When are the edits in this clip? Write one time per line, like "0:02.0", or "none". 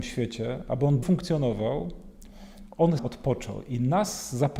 0:01.0
0:03.0

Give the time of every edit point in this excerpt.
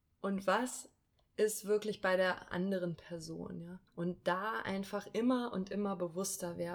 0:03.9

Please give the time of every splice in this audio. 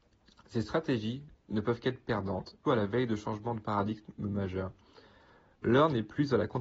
0:02.6

